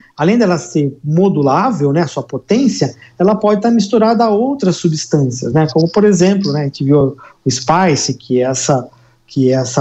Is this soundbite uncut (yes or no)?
yes